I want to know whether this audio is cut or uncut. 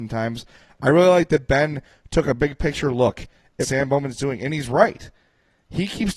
cut